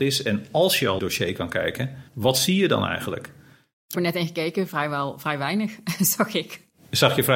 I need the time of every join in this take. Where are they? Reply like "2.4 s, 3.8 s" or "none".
1.0 s, 2.1 s, 3.9 s